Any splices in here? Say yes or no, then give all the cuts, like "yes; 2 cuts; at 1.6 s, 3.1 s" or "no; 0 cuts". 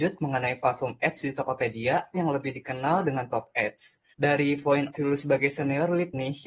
yes; 3 cuts; at 2.1 s, 4.1 s, 4.9 s